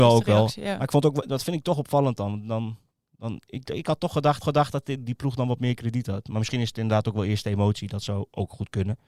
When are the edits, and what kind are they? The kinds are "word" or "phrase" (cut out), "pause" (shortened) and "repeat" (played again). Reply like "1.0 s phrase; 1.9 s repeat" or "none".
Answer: 4.4 s repeat